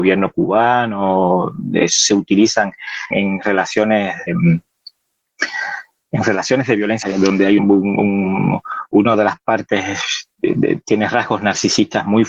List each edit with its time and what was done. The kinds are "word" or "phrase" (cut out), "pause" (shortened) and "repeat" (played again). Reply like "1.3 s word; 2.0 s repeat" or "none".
3.1 s word; 4.3 s word; 7.0 s word; 7.6 s word; 10.3 s pause

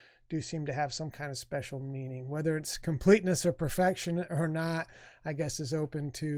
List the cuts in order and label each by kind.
none

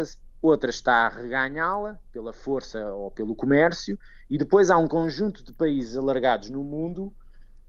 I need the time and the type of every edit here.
none

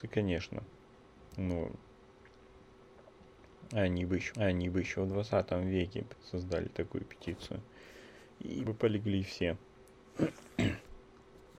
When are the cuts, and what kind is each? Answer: 1.3 s pause; 4.3 s repeat; 6.1 s word; 8.7 s word

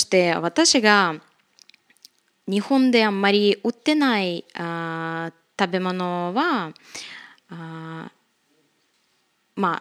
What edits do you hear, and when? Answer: none

